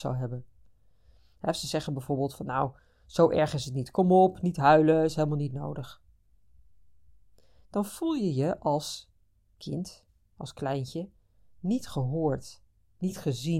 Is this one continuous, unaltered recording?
yes; 0 cuts

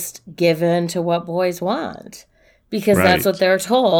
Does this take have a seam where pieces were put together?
no; 0 cuts

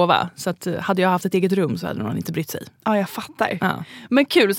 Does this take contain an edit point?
no; 0 cuts

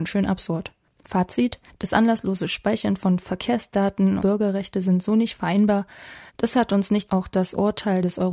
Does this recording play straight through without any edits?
no; 4 cuts; at 1.7 s, 4.2 s, 6.3 s, 7.1 s

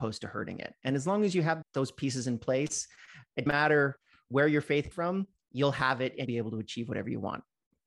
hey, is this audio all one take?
no; 4 cuts; at 1.6 s, 3.5 s, 4.9 s, 6.3 s

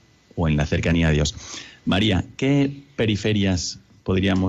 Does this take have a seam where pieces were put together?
no; 0 cuts

